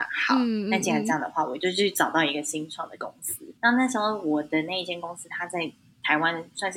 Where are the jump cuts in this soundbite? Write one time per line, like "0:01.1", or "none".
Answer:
0:03.6